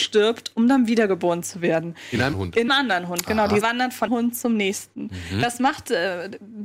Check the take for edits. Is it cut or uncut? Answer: cut